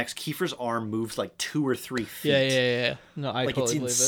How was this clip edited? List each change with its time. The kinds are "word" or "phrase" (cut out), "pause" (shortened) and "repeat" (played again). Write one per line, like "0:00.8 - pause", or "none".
none